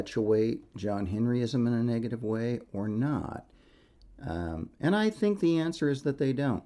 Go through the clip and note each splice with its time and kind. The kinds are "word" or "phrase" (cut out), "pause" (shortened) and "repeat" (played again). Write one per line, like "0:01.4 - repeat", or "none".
none